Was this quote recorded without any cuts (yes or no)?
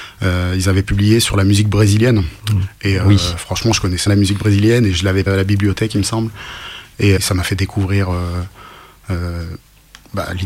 no